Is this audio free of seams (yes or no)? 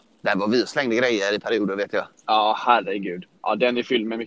yes